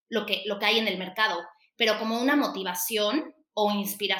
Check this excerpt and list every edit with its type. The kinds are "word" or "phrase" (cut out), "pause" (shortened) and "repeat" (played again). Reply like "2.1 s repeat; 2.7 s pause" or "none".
none